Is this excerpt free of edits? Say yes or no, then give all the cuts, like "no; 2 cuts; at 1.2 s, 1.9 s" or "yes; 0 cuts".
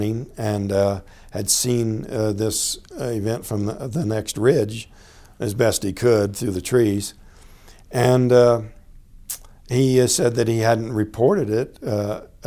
yes; 0 cuts